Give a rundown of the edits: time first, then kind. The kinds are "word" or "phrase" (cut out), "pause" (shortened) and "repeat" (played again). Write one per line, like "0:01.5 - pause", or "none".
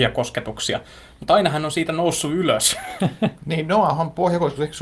none